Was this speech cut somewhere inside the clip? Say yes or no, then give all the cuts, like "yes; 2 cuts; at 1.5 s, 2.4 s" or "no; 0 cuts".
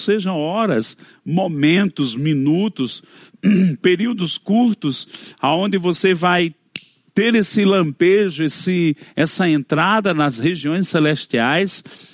no; 0 cuts